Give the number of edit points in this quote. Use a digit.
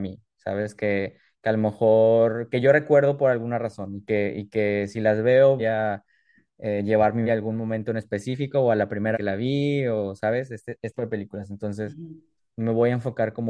4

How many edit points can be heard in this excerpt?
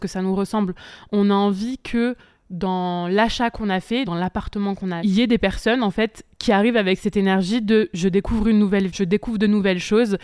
3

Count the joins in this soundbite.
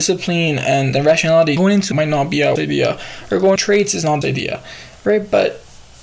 6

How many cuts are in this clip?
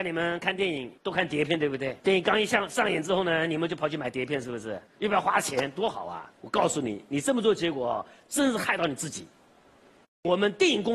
4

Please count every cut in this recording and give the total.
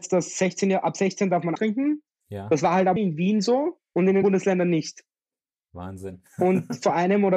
3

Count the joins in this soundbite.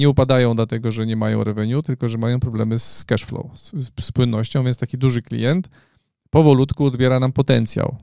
0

